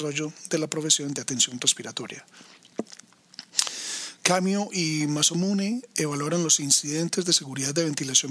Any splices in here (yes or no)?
no